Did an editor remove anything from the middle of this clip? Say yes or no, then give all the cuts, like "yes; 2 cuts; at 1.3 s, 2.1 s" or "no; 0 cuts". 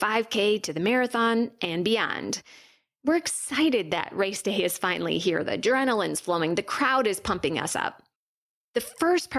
no; 0 cuts